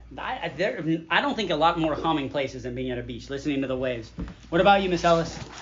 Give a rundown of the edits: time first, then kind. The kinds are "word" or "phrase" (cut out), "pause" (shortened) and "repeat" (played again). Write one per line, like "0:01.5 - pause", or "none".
none